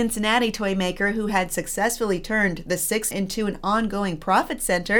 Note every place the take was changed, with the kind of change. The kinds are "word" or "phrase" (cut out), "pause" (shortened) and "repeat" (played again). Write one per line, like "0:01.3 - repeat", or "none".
0:03.1 - phrase